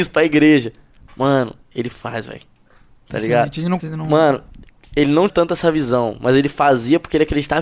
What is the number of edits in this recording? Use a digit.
2